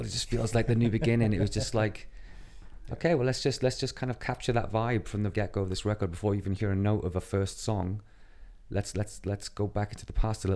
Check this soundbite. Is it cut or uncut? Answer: cut